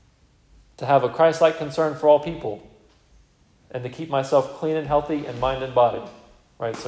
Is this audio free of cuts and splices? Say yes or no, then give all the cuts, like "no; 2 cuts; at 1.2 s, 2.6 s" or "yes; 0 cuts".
yes; 0 cuts